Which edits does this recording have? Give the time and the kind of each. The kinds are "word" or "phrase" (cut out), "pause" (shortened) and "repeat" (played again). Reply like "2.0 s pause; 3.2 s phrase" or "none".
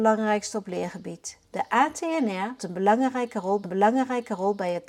1.4 s pause; 2.6 s word; 3.6 s repeat